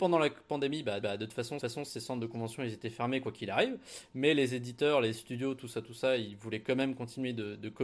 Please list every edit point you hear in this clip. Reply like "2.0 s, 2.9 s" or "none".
1.0 s, 1.6 s